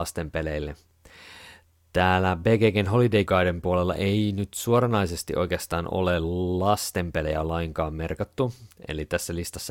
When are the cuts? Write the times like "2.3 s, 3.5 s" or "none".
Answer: 3.3 s

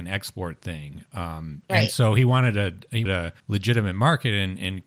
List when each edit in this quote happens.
1.6 s, 3.1 s, 3.4 s

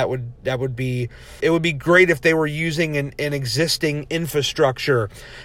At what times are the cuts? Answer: 1.4 s

